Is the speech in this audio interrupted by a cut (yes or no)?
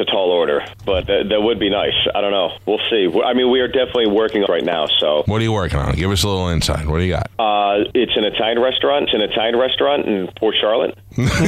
yes